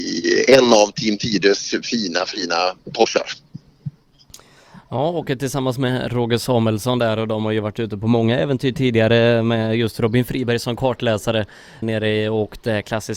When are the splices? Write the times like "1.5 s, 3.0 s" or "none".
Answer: 11.8 s